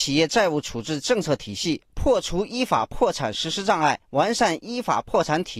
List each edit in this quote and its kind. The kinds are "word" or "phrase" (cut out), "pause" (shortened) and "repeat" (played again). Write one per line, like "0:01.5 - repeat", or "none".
0:04.0 - pause